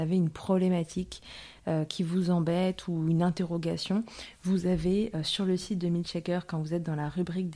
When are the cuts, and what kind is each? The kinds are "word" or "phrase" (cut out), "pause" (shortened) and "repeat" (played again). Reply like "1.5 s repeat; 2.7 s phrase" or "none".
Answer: none